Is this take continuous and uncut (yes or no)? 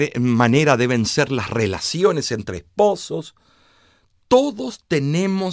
yes